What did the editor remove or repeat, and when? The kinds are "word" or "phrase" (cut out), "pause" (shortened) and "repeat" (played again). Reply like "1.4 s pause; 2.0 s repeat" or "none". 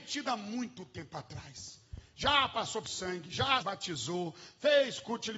2.8 s word; 3.6 s word